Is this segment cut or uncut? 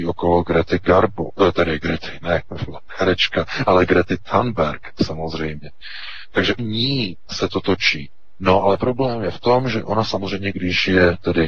cut